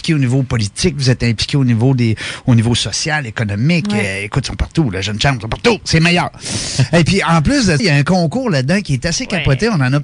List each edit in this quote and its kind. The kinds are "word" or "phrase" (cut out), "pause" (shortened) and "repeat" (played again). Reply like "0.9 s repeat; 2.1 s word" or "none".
7.8 s word